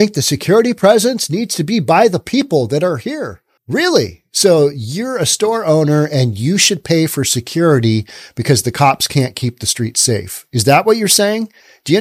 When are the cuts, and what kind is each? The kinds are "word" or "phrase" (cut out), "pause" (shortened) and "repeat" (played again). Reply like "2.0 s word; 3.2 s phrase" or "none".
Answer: 3.6 s pause